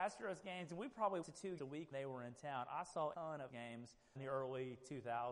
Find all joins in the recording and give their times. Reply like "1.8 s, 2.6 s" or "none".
1.2 s, 1.6 s, 1.9 s, 3.1 s, 3.5 s, 4.2 s